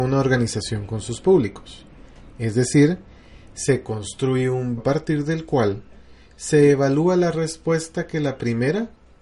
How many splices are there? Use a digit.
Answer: 1